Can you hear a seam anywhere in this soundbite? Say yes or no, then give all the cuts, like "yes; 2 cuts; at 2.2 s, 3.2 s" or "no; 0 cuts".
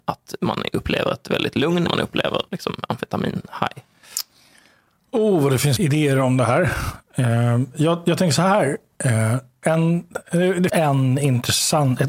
yes; 4 cuts; at 1.9 s, 2.5 s, 5.8 s, 10.7 s